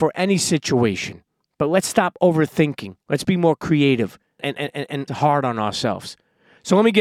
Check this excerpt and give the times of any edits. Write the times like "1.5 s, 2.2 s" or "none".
1.4 s, 3.0 s, 4.4 s, 5.1 s